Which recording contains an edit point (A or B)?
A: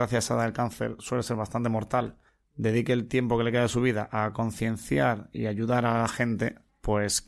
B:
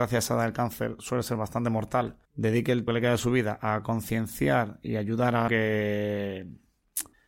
B